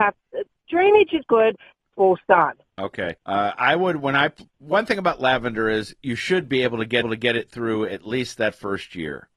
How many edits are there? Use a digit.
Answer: 6